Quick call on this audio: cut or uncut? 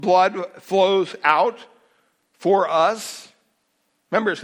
uncut